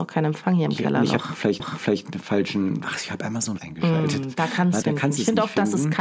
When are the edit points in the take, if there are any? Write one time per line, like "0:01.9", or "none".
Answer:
0:01.6
0:02.8
0:03.6
0:04.8